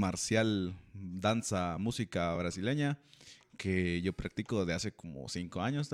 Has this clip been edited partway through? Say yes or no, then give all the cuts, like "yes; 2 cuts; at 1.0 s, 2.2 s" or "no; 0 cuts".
no; 0 cuts